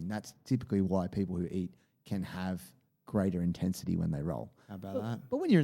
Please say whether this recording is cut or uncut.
uncut